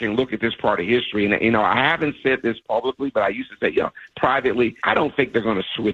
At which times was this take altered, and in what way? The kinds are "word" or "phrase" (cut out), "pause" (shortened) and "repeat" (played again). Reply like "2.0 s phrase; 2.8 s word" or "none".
4.8 s pause

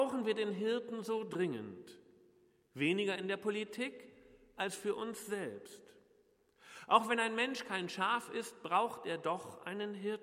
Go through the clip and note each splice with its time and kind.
none

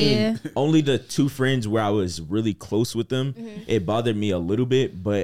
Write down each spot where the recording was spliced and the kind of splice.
none

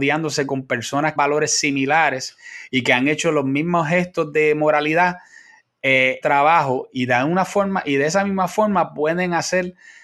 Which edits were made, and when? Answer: 1.2 s phrase; 6.2 s phrase

